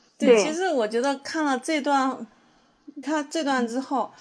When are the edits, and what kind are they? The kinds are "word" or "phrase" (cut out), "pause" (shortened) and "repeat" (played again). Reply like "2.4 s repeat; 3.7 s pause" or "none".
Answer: 3.0 s word